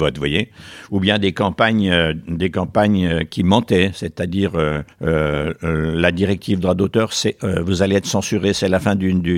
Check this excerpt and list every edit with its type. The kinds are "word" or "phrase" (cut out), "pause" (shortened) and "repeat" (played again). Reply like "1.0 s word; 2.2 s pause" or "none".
4.9 s pause